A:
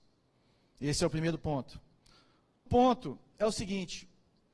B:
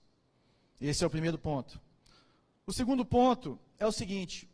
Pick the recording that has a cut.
A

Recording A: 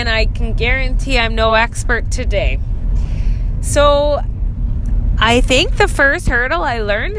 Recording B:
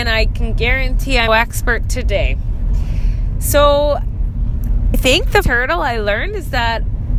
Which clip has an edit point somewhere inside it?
B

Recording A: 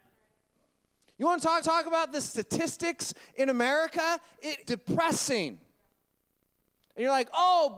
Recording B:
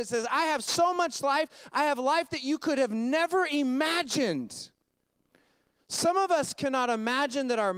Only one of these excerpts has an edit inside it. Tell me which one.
A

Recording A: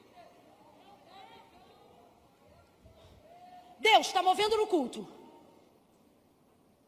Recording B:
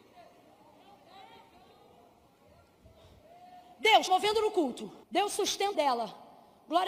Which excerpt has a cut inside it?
B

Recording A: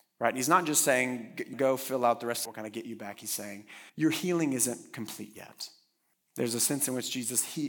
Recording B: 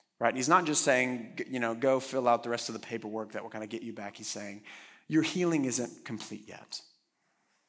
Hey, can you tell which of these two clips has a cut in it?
A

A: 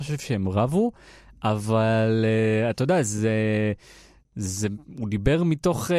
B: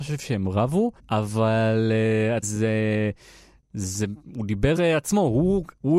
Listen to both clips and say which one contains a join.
B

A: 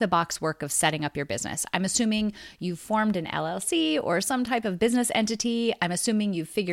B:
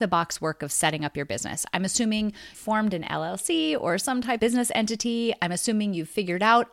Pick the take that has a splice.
B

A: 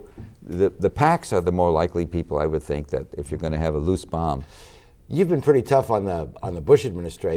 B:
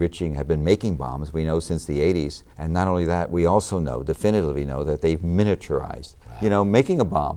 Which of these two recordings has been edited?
B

